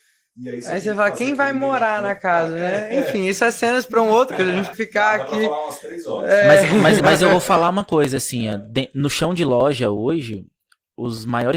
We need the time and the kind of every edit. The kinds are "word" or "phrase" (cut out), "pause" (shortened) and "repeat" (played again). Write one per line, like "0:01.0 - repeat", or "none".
0:04.3 - word
0:04.7 - word
0:07.0 - word